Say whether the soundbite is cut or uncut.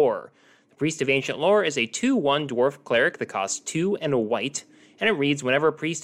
uncut